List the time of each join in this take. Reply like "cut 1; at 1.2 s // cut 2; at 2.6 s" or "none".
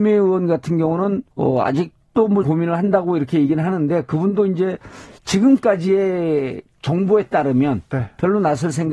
cut 1; at 1.3 s // cut 2; at 2.4 s